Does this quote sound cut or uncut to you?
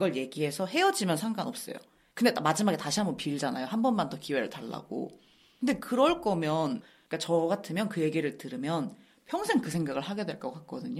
uncut